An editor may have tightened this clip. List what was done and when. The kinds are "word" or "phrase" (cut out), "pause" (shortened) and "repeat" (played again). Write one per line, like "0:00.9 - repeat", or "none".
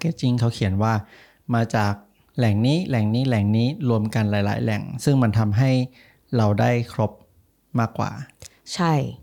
none